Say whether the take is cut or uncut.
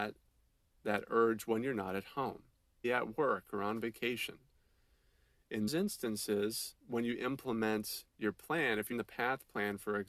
cut